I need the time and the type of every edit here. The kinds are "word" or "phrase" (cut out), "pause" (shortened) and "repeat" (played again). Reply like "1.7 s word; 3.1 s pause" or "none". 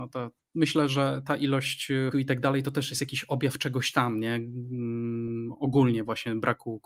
2.1 s word